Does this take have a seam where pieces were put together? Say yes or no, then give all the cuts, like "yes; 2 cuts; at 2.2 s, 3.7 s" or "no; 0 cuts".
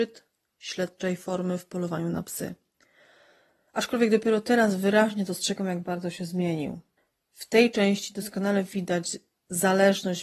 no; 0 cuts